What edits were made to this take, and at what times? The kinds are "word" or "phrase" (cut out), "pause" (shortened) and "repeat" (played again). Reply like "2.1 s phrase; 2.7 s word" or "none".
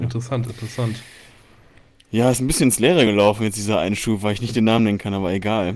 none